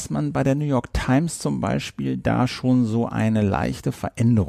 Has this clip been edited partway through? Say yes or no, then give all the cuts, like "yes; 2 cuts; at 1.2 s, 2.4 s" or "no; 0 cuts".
no; 0 cuts